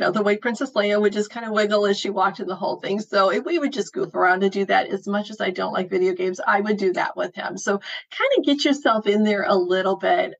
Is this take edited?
no; 0 cuts

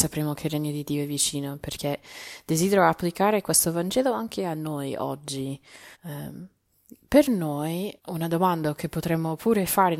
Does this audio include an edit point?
yes; 2 cuts; at 5.9 s, 8.0 s

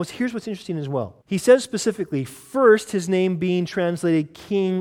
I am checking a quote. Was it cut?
yes; 1 cut; at 1.2 s

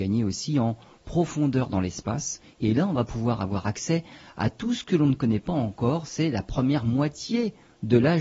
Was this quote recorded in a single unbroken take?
yes; 0 cuts

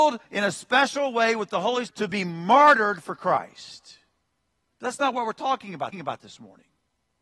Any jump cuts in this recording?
yes; 2 cuts; at 1.9 s, 5.9 s

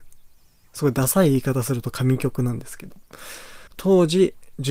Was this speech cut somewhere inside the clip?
yes; 1 cut; at 3.7 s

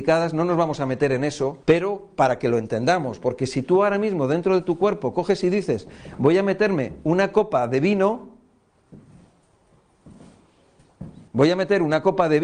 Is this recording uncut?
no; 2 cuts; at 1.6 s, 11.3 s

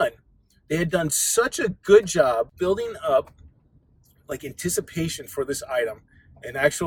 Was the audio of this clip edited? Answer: no; 0 cuts

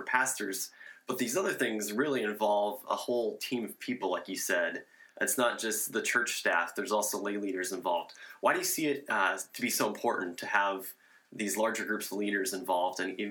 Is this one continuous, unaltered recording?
yes; 0 cuts

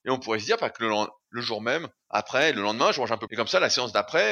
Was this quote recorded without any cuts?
no; 1 cut; at 3.3 s

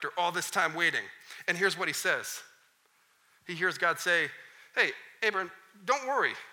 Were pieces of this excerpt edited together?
no; 0 cuts

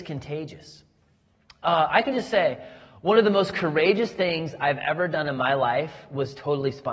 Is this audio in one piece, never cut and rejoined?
yes; 0 cuts

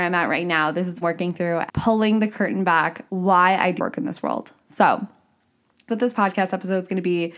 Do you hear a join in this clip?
yes; 5 cuts; at 1.0 s, 1.7 s, 3.1 s, 3.8 s, 5.9 s

